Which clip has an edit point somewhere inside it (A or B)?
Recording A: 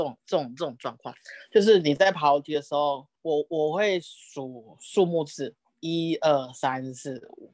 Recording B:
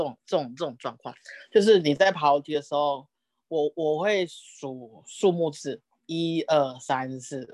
A